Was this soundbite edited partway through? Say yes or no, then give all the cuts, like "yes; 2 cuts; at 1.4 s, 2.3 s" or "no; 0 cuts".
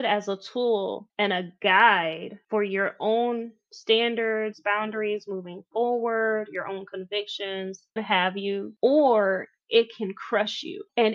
yes; 1 cut; at 8.0 s